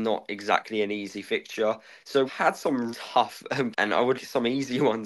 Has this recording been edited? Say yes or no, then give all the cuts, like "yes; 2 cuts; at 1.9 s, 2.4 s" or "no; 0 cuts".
yes; 4 cuts; at 2.3 s, 2.9 s, 3.7 s, 4.1 s